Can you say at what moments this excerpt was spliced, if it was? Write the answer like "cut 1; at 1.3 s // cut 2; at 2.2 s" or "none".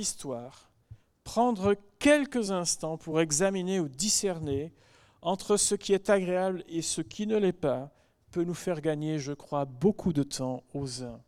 none